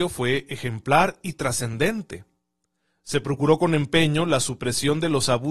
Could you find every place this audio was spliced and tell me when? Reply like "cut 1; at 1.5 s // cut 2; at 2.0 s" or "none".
none